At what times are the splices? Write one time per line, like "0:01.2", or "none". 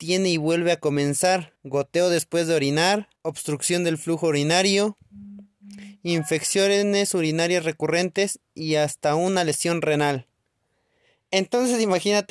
0:01.6
0:03.2